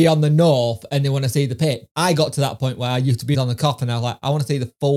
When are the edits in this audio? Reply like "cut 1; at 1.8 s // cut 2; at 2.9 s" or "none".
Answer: cut 1; at 1.9 s // cut 2; at 3.3 s

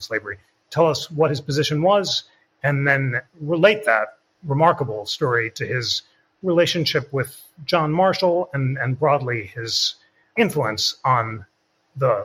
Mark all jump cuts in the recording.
none

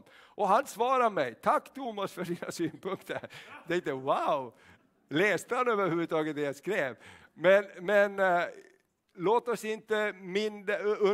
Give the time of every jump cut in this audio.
none

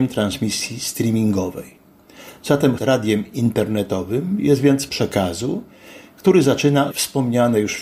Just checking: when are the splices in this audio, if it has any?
cut 1; at 2.8 s // cut 2; at 4.9 s // cut 3; at 6.9 s

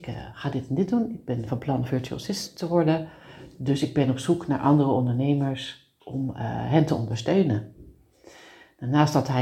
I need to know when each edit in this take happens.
cut 1; at 6.0 s

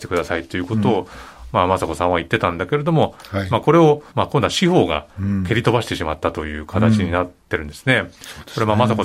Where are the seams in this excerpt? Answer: cut 1; at 4.1 s // cut 2; at 5.1 s

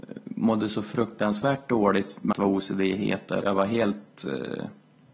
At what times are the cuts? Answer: cut 1; at 2.3 s // cut 2; at 3.4 s

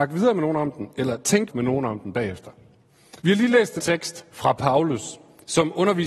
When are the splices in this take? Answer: cut 1; at 1.5 s // cut 2; at 3.2 s // cut 3; at 3.8 s

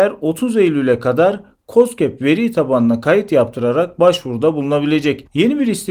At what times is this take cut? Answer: none

